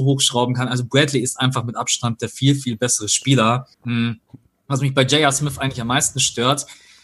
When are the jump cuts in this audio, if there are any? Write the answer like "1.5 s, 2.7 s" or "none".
3.7 s